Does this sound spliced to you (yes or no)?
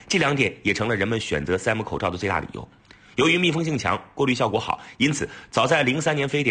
no